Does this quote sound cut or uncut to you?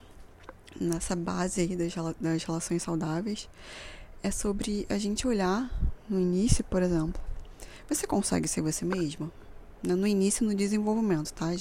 uncut